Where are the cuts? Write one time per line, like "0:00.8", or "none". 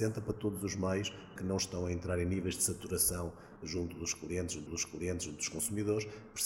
0:01.4
0:04.7